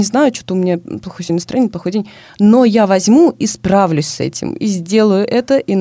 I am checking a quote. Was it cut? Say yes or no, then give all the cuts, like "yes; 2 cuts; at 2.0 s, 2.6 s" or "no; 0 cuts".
no; 0 cuts